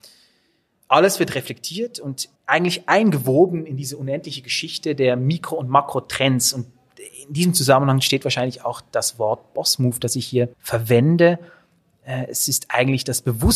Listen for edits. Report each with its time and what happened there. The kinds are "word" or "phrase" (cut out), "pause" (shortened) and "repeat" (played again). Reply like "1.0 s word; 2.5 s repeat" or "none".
2.3 s pause; 10.5 s pause